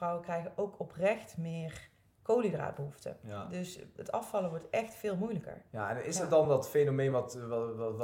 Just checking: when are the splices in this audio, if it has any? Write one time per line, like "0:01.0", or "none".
none